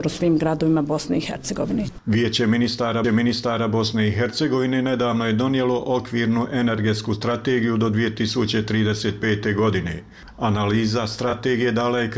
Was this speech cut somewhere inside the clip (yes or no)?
yes